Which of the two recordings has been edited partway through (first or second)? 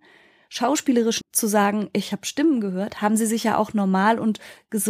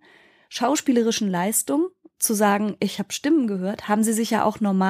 first